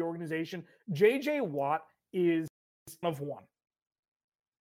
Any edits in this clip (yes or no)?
yes